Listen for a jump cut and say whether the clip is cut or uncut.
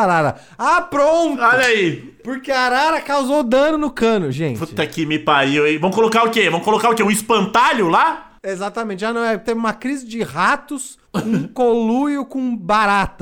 cut